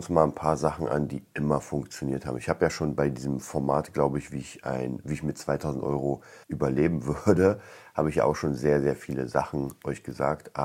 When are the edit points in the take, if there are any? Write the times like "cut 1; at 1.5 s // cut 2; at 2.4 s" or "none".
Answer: cut 1; at 6.4 s